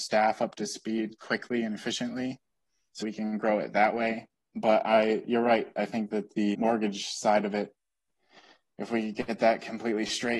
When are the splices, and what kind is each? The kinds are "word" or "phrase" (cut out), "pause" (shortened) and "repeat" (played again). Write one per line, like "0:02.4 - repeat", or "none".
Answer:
0:03.0 - word
0:06.5 - word